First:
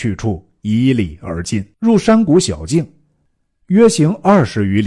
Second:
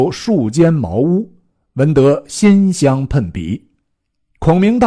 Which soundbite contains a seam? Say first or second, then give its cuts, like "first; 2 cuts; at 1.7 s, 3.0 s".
first; 1 cut; at 1.7 s